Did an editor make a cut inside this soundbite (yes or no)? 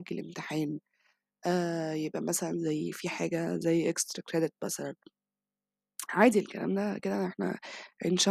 yes